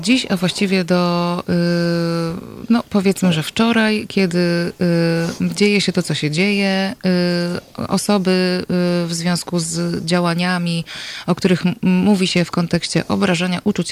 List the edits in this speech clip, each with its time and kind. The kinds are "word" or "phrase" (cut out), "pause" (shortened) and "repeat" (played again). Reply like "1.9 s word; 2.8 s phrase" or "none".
none